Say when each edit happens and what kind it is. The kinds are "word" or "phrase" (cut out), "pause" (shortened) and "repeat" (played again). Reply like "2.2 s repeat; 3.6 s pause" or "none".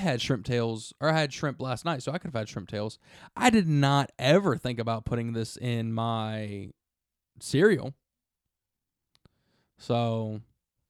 none

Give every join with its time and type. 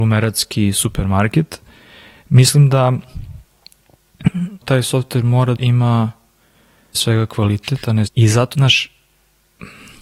4.6 s word; 5.6 s word; 6.9 s word; 8.1 s word; 8.5 s word

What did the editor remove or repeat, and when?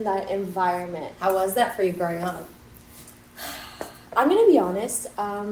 4.1 s pause

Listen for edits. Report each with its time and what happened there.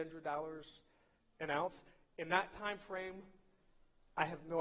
none

